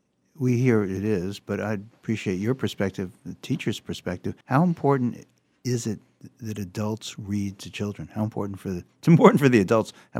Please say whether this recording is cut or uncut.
cut